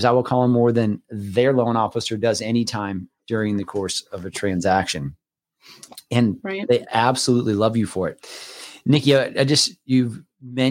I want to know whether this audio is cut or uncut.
uncut